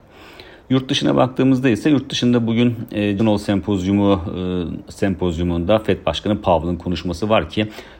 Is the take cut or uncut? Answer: cut